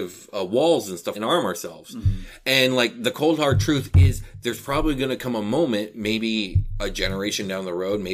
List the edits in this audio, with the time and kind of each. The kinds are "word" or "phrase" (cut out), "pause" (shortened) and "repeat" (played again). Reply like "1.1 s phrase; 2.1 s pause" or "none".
1.1 s phrase